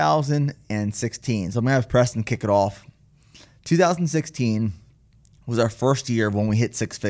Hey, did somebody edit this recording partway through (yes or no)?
no